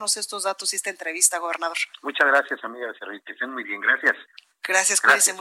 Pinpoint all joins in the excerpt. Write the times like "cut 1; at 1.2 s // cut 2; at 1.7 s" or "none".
cut 1; at 1.9 s